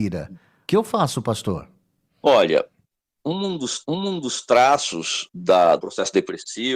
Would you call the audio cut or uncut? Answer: cut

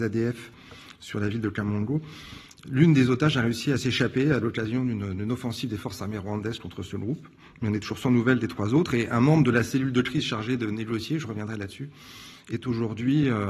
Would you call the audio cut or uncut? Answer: uncut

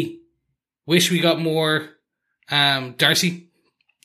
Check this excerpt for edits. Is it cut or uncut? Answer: uncut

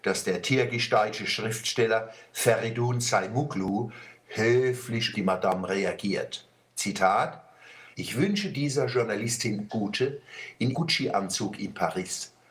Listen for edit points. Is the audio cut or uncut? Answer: cut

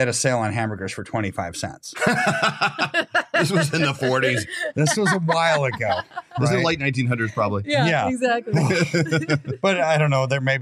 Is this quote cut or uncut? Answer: uncut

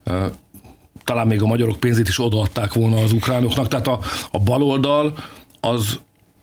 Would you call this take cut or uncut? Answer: uncut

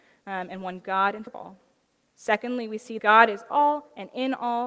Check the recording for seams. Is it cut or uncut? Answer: cut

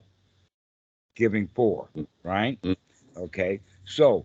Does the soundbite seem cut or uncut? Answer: cut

